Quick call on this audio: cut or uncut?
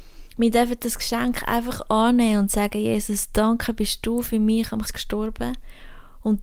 cut